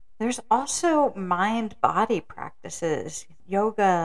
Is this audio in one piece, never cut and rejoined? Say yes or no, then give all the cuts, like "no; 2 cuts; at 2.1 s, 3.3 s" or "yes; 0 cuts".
yes; 0 cuts